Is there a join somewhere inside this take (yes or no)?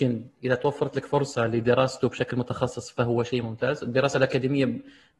no